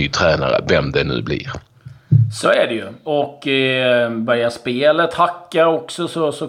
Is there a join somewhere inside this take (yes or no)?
no